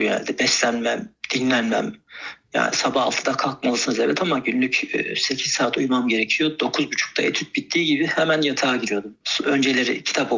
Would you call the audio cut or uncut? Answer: uncut